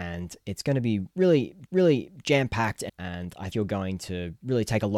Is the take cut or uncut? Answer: cut